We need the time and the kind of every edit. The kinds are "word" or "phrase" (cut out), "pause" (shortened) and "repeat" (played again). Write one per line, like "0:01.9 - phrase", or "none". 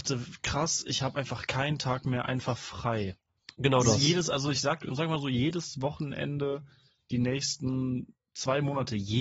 none